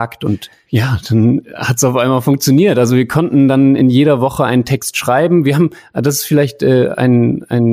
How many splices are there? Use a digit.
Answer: 0